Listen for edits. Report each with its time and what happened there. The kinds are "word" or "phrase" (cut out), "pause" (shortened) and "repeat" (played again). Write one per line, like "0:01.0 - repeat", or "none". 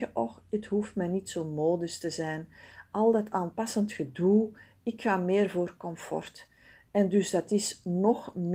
none